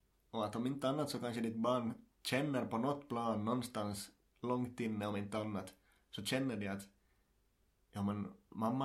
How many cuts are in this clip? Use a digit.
0